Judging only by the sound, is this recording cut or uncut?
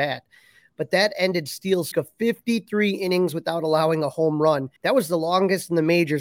cut